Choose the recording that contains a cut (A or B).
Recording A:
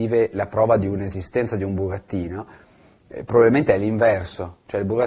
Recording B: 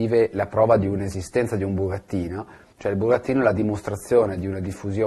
B